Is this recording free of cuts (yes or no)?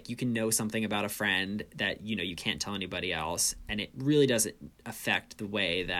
yes